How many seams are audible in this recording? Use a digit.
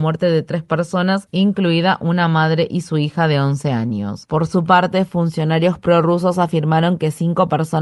0